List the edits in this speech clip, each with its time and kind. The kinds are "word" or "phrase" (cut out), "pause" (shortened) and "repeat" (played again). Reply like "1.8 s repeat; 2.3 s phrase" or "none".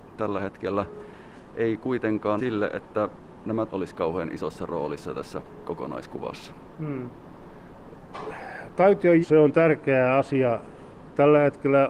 2.4 s word; 3.7 s word; 9.2 s word